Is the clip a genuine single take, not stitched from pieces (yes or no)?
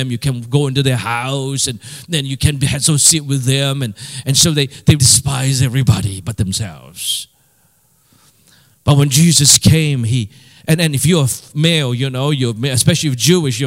no